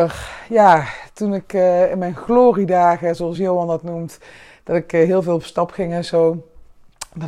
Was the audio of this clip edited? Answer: no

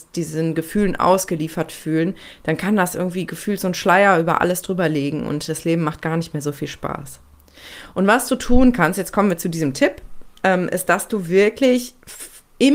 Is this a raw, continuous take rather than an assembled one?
yes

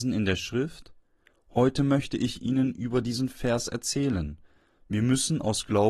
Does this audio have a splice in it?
no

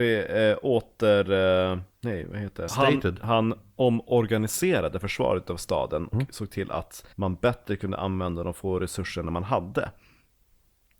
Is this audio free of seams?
no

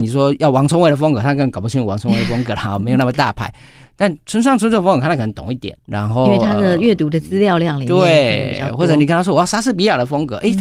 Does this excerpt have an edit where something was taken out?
yes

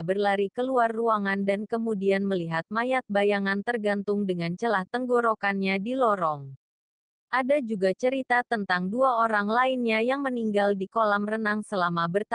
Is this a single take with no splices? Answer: yes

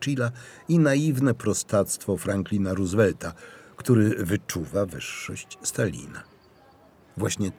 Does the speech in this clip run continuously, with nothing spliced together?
yes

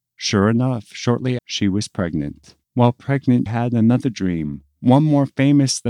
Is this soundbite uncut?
no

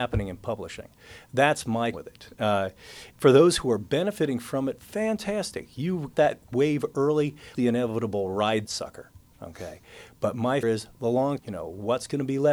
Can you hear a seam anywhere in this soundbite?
yes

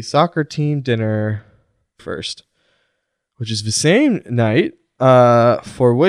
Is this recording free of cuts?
no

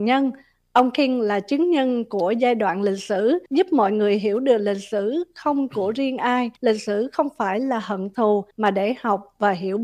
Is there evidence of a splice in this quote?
yes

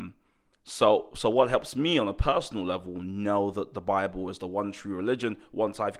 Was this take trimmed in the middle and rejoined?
no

